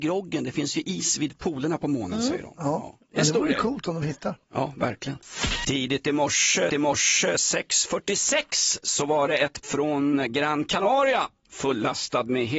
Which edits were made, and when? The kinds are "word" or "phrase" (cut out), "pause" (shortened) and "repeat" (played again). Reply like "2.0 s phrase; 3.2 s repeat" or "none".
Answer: 6.7 s repeat; 9.6 s word

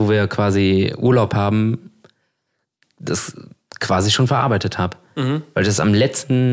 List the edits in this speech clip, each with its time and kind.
none

